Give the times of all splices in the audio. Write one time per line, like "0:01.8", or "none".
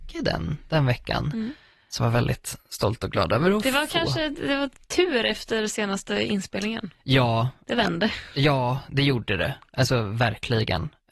0:02.0